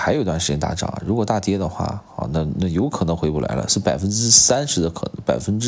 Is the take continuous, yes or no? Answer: yes